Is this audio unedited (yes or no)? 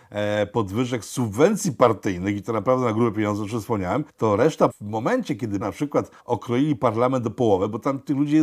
no